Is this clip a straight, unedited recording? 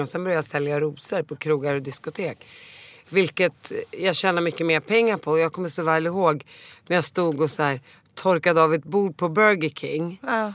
yes; 0 cuts

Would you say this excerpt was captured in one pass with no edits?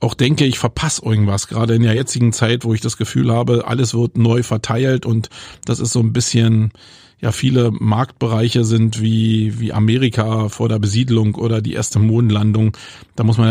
yes; 0 cuts

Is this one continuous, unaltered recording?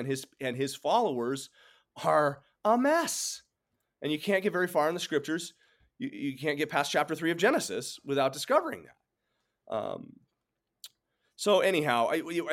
yes; 0 cuts

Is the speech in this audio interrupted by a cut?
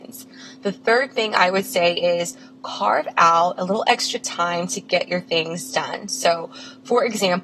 no; 0 cuts

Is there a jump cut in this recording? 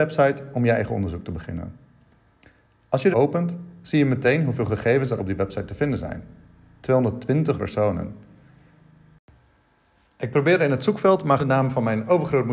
yes; 4 cuts; at 3.1 s, 5.2 s, 7.6 s, 11.4 s

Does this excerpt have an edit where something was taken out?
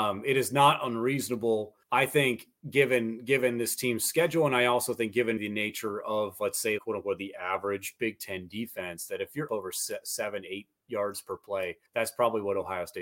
yes; 5 cuts; at 1.8 s, 5.4 s, 6.8 s, 9.5 s, 11.9 s

